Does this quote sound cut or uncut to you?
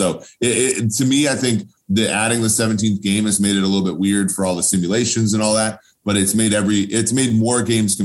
uncut